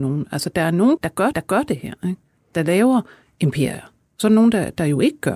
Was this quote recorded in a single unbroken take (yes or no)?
no